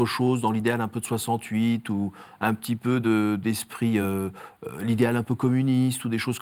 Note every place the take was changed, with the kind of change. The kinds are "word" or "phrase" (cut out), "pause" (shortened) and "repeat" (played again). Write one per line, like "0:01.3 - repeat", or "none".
none